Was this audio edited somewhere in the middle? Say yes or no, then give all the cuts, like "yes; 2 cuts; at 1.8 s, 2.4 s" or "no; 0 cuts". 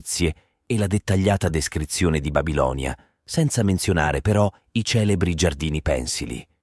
no; 0 cuts